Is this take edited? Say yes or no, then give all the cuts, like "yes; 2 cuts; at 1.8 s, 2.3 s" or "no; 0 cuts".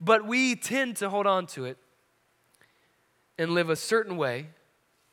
no; 0 cuts